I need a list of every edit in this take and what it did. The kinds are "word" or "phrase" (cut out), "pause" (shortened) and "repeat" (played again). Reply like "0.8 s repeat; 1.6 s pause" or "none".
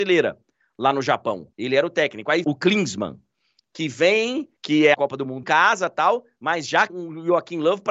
1.5 s pause; 2.4 s phrase; 4.6 s pause; 4.9 s word; 5.4 s word; 6.9 s word